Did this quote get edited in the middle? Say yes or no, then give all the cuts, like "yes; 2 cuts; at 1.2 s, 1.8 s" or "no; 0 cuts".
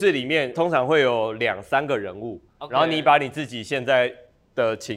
yes; 1 cut; at 2.5 s